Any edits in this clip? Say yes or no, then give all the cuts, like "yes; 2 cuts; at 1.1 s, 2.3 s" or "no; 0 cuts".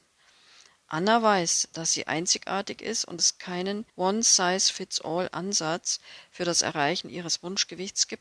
yes; 2 cuts; at 3.2 s, 3.9 s